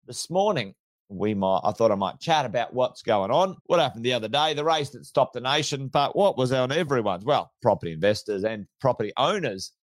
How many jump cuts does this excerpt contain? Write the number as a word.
one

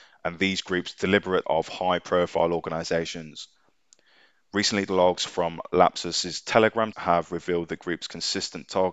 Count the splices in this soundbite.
three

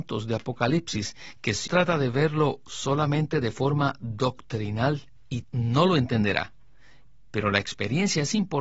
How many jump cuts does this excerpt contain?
two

